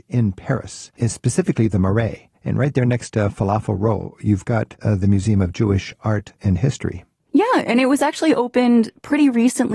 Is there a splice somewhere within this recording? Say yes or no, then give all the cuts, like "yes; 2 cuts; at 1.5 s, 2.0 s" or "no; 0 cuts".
yes; 2 cuts; at 1.0 s, 2.4 s